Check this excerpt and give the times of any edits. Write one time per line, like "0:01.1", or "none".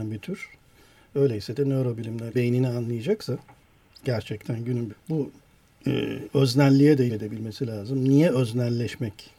0:02.3
0:04.9
0:07.1